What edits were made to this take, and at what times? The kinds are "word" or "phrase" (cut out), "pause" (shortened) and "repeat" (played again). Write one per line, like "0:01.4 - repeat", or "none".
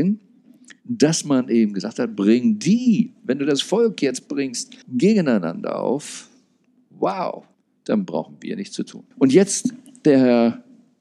0:04.8 - pause
0:07.5 - pause
0:09.1 - pause